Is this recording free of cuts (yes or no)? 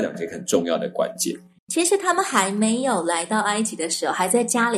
yes